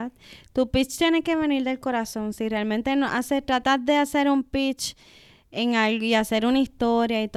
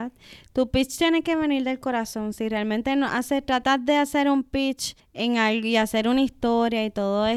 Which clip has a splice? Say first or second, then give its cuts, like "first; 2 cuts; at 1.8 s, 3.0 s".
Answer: second; 1 cut; at 5.0 s